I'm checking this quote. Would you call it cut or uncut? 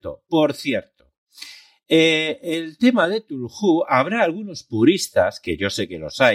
uncut